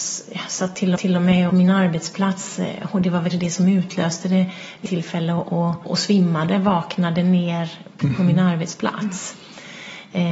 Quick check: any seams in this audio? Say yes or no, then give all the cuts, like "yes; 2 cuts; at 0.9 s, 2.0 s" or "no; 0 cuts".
yes; 6 cuts; at 1.0 s, 1.5 s, 3.3 s, 4.9 s, 5.8 s, 8.0 s